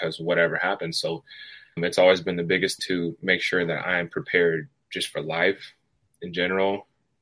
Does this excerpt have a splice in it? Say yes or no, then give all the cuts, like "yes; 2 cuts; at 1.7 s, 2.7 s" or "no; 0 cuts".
yes; 2 cuts; at 1.8 s, 2.8 s